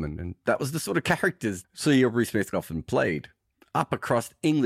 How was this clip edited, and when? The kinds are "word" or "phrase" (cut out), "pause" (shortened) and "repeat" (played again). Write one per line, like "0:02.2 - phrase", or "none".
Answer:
0:01.6 - word
0:02.5 - word